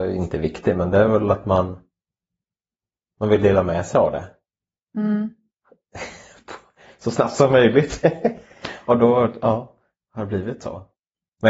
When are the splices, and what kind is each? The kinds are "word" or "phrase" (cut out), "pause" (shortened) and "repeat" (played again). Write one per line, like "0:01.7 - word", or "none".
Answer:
none